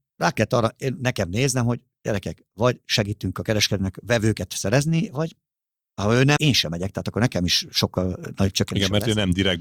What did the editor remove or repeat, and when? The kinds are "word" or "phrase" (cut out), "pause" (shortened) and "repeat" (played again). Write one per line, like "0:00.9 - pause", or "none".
0:06.4 - word